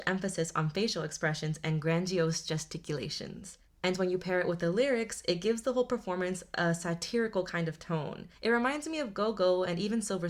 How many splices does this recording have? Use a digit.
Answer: 1